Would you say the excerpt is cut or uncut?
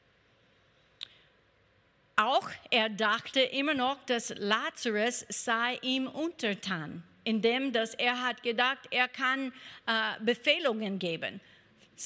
uncut